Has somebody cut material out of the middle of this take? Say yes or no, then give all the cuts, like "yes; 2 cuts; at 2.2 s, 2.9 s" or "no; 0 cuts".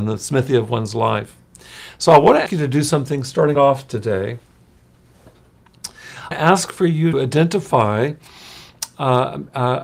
yes; 4 cuts; at 2.5 s, 3.5 s, 6.3 s, 7.1 s